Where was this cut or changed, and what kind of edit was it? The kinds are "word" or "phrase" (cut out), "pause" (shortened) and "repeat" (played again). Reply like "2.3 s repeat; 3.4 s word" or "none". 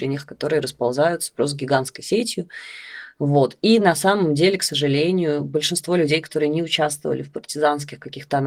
none